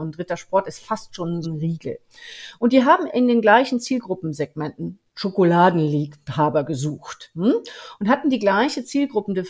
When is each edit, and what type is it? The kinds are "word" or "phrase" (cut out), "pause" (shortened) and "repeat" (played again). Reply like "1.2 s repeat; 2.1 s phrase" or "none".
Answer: 1.4 s word; 3.1 s word